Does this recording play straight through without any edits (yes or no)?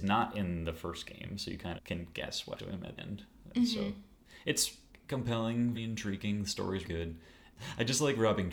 no